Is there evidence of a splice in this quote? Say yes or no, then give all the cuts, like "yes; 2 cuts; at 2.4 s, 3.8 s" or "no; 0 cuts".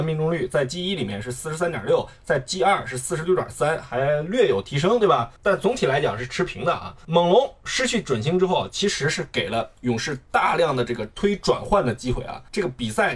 no; 0 cuts